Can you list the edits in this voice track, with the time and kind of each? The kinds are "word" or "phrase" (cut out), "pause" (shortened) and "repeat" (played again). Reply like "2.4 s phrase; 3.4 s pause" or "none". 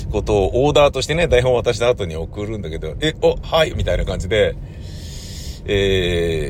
3.4 s word; 3.7 s phrase